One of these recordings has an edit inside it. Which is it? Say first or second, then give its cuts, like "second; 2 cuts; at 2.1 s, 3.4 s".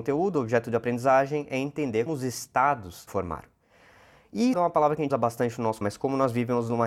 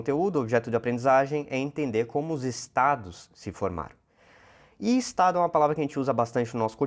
first; 5 cuts; at 2.1 s, 3.1 s, 4.5 s, 5.1 s, 5.8 s